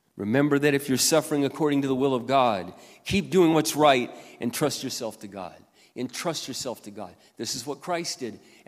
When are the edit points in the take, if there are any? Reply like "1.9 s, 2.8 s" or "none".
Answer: none